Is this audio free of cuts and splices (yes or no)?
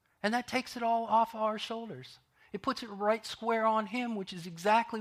yes